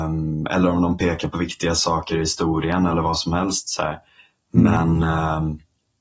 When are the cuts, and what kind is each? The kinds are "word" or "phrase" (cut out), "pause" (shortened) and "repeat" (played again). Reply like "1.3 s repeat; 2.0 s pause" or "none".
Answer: none